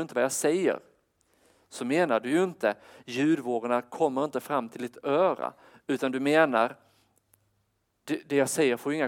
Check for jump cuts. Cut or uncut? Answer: uncut